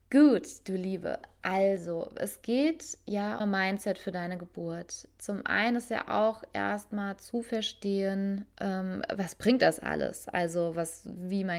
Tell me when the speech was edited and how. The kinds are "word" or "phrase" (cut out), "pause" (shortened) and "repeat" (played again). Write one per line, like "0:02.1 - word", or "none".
0:03.4 - phrase

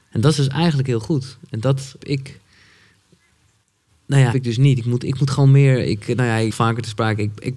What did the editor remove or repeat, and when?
0:02.0 - word
0:04.3 - word
0:06.5 - phrase

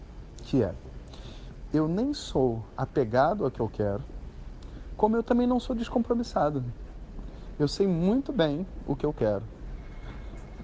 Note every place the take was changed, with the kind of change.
none

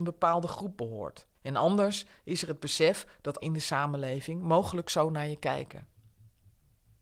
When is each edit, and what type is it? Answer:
0:01.3 - pause
0:03.4 - word

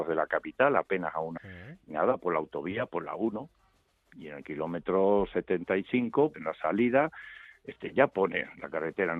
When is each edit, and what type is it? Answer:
0:01.4 - word
0:06.3 - word

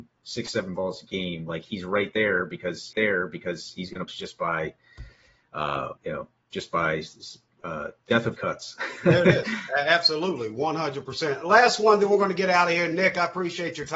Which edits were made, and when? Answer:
0:02.9 - repeat
0:04.1 - phrase
0:06.0 - pause
0:07.5 - pause
0:08.3 - phrase

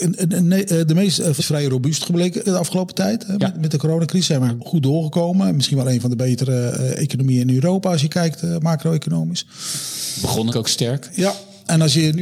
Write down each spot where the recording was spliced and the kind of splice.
0:01.4 - phrase
0:02.5 - word
0:04.6 - word
0:10.5 - word

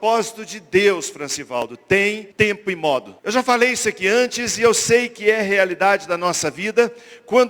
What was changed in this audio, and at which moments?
0:02.3 - pause
0:03.2 - pause

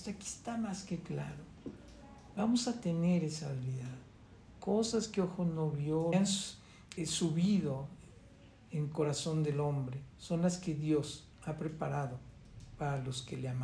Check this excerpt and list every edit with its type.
0:06.1 - phrase
0:07.0 - word
0:10.1 - pause
0:11.3 - pause

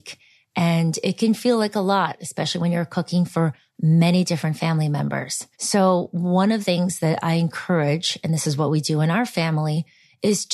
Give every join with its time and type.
0:05.5 - pause
0:06.6 - word

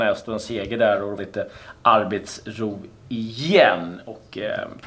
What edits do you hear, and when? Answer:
0:01.2 - phrase

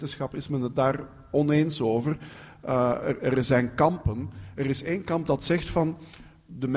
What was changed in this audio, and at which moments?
none

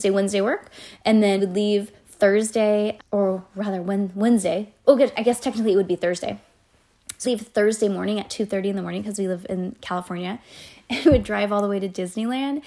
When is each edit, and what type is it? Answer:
0:01.4 - word
0:03.0 - word
0:07.2 - word
0:11.0 - word

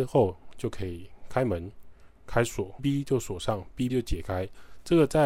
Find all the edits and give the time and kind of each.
0:02.8 - phrase
0:03.9 - word

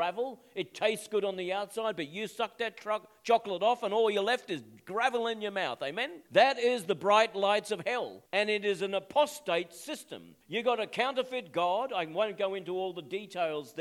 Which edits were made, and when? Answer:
0:06.3 - pause
0:08.3 - pause
0:10.4 - pause

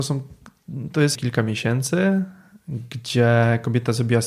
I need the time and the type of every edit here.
0:01.1 - phrase

